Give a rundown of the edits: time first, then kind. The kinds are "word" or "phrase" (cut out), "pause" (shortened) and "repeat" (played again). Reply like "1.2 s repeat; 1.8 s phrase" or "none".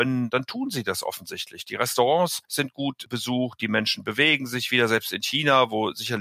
2.4 s pause

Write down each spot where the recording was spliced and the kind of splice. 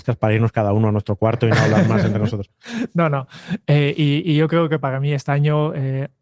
none

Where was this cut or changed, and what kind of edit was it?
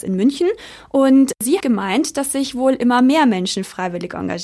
1.6 s word

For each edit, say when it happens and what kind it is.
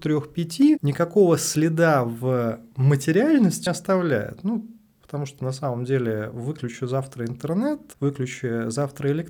3.7 s phrase

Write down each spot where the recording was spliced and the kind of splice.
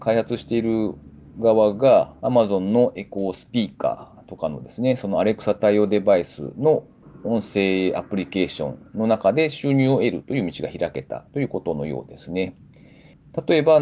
2.2 s pause

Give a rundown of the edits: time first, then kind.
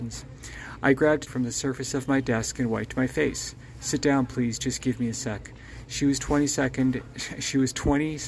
1.3 s word

